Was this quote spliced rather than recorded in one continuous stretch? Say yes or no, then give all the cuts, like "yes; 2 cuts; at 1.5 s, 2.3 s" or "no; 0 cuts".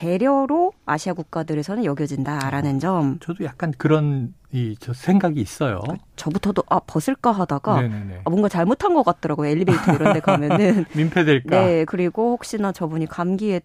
no; 0 cuts